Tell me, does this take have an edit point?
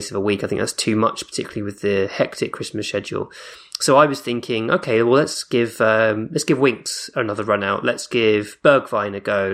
no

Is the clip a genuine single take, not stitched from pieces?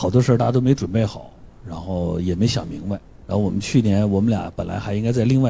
no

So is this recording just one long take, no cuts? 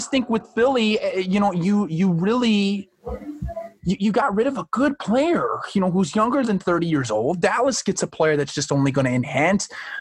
yes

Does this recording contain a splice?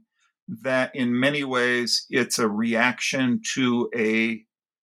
no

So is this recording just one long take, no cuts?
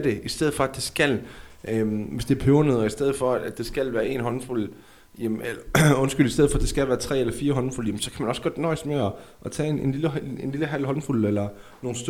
yes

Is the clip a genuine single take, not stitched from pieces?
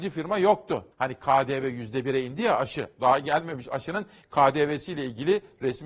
no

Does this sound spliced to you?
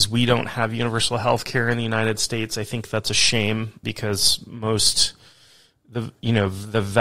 yes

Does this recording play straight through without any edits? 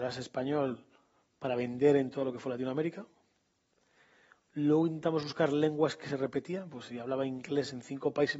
yes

